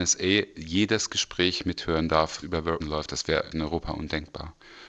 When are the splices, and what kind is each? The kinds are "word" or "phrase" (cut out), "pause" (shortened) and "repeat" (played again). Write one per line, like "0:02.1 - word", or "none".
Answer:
0:02.4 - word
0:02.8 - word
0:03.5 - word